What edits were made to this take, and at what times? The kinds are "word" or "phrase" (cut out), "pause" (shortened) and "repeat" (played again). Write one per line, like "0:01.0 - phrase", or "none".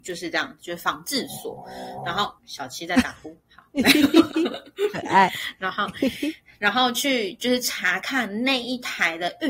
0:02.4 - word